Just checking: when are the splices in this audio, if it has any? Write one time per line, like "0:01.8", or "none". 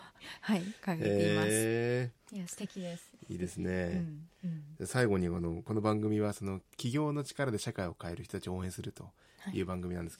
0:02.2